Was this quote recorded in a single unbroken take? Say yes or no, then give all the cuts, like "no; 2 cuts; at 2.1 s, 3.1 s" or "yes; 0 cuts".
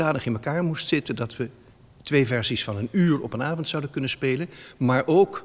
yes; 0 cuts